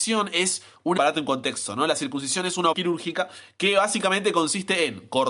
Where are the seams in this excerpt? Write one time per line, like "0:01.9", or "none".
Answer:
0:01.0
0:02.7